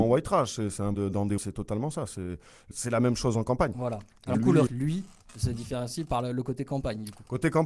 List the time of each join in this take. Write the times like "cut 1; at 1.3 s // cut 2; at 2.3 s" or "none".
cut 1; at 0.9 s // cut 2; at 1.4 s // cut 3; at 2.7 s // cut 4; at 4.3 s // cut 5; at 4.7 s